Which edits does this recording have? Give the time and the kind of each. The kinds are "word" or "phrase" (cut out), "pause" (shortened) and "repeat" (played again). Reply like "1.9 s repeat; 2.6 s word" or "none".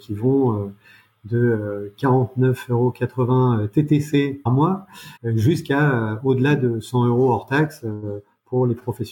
4.5 s word; 5.2 s pause